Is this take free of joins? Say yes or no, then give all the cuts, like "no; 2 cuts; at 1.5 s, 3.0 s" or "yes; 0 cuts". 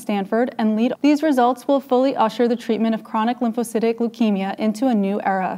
no; 1 cut; at 0.9 s